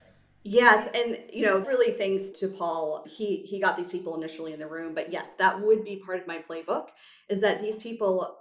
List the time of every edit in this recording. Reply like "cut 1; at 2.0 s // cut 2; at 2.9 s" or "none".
cut 1; at 1.6 s // cut 2; at 2.3 s // cut 3; at 3.0 s